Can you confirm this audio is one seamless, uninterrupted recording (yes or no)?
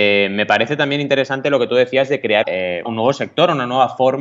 no